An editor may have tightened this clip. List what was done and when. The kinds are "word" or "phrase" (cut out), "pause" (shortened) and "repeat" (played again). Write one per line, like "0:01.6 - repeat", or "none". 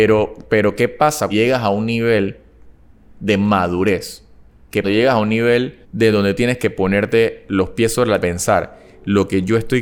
0:01.3 - word
0:04.8 - phrase
0:05.8 - pause
0:06.4 - word
0:08.2 - phrase